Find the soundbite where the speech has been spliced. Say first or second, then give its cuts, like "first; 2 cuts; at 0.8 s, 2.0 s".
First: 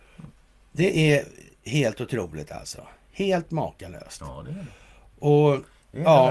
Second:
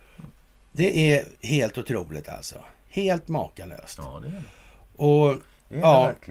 second; 1 cut; at 1.3 s